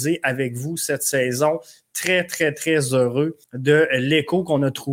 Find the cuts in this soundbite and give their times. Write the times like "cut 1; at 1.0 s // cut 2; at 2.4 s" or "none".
cut 1; at 3.4 s